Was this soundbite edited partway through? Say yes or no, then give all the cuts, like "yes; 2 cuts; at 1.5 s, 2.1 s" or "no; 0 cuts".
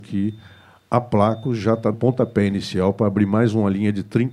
yes; 1 cut; at 1.9 s